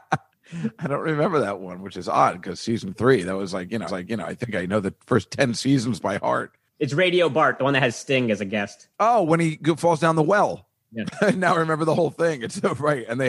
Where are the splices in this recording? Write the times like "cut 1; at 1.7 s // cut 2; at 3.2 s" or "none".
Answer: cut 1; at 3.9 s // cut 2; at 6.7 s // cut 3; at 8.9 s